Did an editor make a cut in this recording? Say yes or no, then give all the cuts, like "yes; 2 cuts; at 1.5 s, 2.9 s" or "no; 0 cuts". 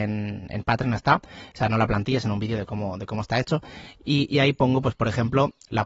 no; 0 cuts